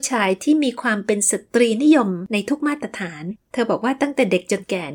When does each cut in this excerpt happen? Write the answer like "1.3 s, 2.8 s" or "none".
3.4 s